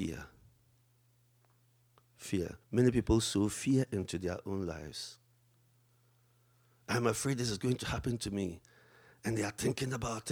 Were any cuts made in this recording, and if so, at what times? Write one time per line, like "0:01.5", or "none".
0:02.6